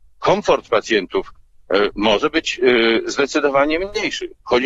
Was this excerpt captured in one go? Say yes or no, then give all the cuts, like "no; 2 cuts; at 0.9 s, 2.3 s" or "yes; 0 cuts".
yes; 0 cuts